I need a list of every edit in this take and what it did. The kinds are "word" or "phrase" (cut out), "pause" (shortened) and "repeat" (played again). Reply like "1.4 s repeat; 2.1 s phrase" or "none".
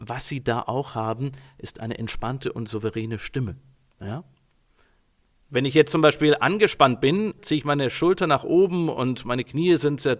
none